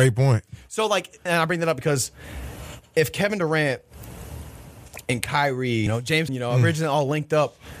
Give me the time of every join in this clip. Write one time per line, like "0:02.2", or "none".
0:01.3
0:05.9
0:06.3